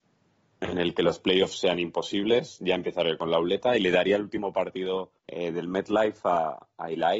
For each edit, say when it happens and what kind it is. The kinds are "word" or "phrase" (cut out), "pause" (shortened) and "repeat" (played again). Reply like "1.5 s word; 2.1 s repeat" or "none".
5.2 s pause